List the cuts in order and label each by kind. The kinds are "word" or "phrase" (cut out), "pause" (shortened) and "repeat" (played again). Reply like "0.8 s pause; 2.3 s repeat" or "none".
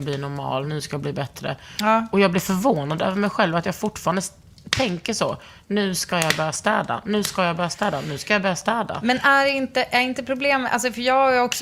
none